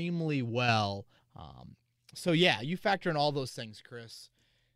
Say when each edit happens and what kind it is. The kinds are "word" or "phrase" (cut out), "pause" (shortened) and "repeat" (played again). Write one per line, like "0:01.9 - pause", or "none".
0:01.2 - pause